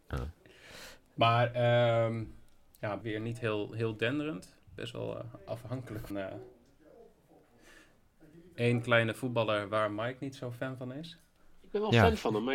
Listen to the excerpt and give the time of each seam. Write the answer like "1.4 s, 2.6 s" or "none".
3.0 s, 4.6 s, 6.1 s